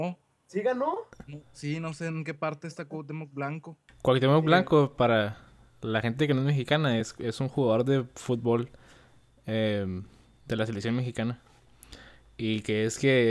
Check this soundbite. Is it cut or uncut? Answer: uncut